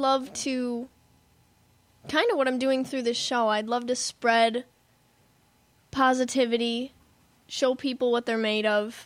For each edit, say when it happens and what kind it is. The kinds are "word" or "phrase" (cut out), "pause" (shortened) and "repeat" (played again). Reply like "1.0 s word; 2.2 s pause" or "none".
none